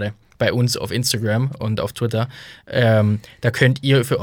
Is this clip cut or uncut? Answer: uncut